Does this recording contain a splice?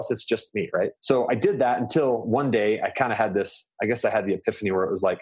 yes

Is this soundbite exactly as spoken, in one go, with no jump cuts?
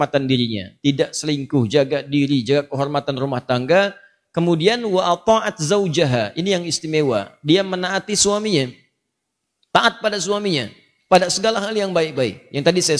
yes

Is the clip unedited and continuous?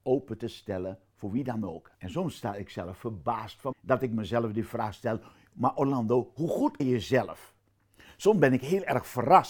no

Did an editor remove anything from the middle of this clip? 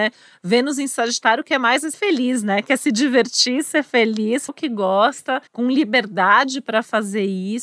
yes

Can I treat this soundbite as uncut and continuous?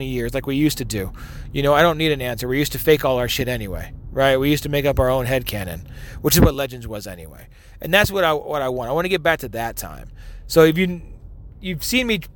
yes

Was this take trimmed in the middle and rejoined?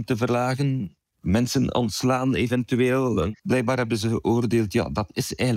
yes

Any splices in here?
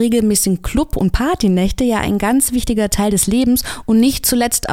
no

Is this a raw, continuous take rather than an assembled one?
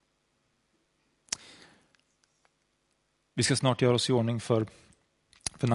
yes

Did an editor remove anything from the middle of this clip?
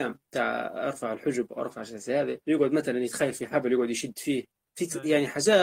yes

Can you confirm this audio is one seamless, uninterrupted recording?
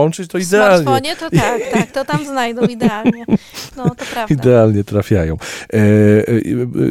yes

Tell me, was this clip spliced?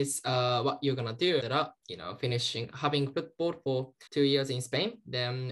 yes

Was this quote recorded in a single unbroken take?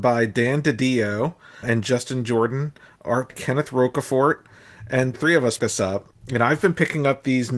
no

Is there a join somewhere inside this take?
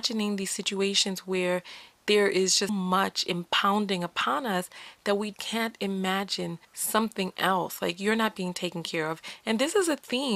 yes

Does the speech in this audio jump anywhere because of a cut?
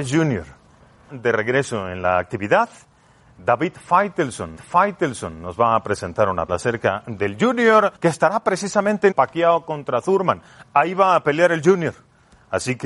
yes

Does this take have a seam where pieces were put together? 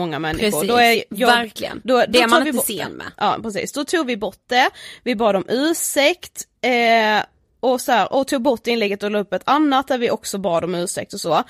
no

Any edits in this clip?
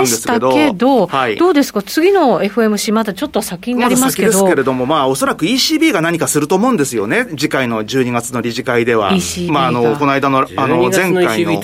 no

